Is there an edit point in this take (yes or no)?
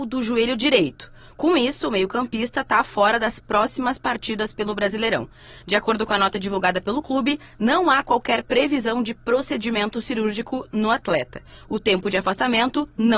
no